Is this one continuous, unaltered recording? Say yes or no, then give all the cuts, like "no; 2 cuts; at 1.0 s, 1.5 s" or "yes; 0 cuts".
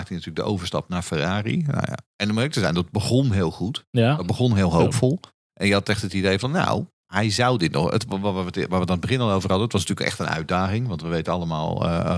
no; 2 cuts; at 2.1 s, 6.9 s